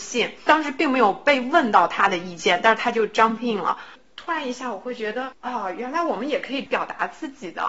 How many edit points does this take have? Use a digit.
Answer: 0